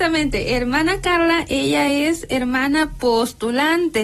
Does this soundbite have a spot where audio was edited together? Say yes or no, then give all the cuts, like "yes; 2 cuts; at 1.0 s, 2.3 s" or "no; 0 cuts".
no; 0 cuts